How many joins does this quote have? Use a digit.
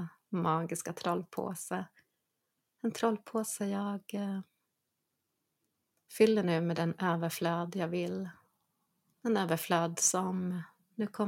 0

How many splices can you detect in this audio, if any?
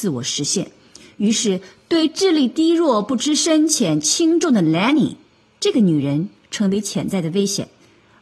0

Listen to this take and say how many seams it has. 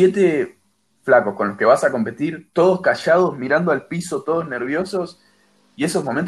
0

